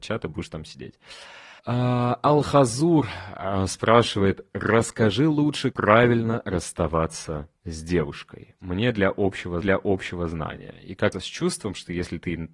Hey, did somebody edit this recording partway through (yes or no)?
yes